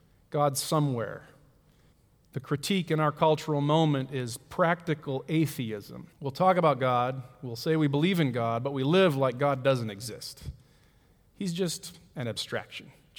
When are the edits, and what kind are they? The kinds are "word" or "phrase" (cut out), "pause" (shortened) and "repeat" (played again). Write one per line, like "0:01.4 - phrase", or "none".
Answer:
0:01.9 - pause
0:06.1 - pause